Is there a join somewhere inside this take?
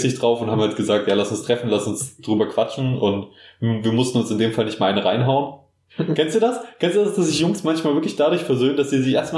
no; 0 cuts

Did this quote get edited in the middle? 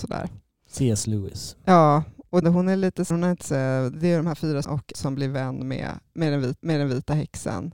yes; 6 cuts; at 2.4 s, 3.1 s, 3.4 s, 4.6 s, 4.9 s, 6.6 s

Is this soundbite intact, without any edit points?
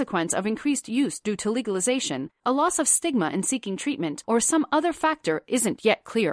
yes; 0 cuts

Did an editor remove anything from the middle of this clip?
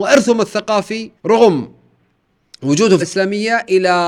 yes; 2 cuts; at 1.2 s, 3.0 s

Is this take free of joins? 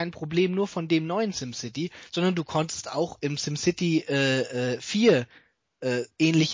yes; 0 cuts

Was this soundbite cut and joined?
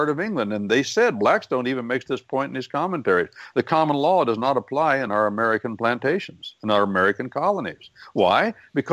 no; 0 cuts

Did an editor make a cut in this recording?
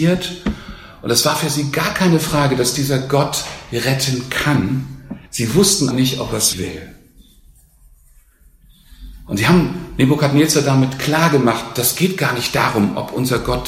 yes; 3 cuts; at 5.3 s, 5.9 s, 6.5 s

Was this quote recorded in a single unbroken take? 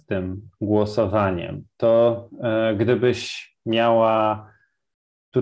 yes; 0 cuts

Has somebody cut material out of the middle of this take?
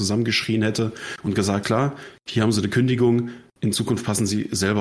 yes; 1 cut; at 1.6 s

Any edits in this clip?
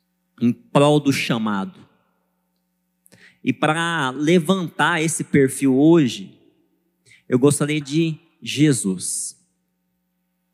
yes; 1 cut; at 7.8 s

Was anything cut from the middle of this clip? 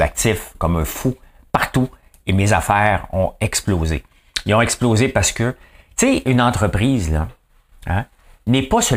no; 0 cuts

